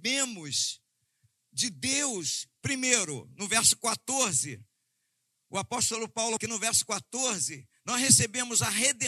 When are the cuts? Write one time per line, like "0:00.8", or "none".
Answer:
0:06.4